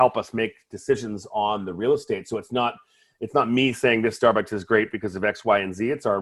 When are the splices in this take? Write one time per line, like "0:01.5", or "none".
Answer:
none